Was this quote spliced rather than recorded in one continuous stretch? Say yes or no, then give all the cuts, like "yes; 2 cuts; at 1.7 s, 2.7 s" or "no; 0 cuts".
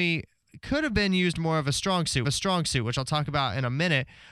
yes; 1 cut; at 2.2 s